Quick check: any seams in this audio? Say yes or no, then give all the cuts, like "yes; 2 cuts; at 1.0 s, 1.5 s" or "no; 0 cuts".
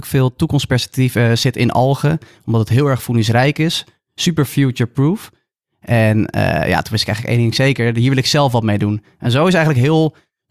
no; 0 cuts